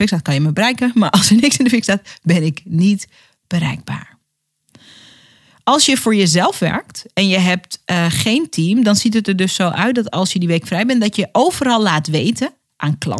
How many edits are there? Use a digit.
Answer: 0